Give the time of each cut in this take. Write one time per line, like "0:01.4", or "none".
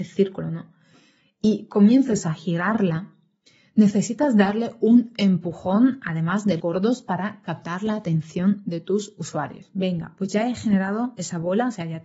0:06.6